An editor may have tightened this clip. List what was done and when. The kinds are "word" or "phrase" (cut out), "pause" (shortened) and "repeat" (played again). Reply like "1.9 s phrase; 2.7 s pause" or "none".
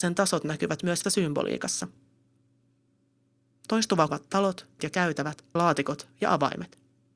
1.0 s word; 4.1 s word; 4.8 s word; 5.6 s word